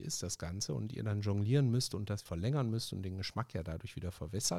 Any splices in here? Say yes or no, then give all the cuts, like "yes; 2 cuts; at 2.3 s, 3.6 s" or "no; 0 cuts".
yes; 1 cut; at 2.3 s